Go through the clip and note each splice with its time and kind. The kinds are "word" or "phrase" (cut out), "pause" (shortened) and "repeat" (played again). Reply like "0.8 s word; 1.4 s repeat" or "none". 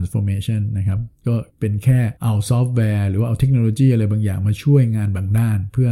1.5 s pause; 2.2 s pause